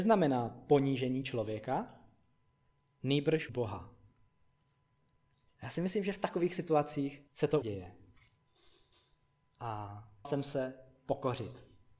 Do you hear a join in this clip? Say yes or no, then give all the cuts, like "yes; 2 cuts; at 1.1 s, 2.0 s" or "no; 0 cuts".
yes; 4 cuts; at 3.5 s, 7.3 s, 7.6 s, 10.2 s